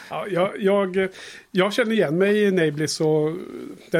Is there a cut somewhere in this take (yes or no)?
no